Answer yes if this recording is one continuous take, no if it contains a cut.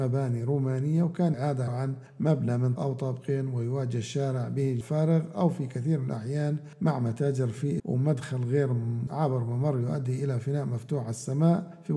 no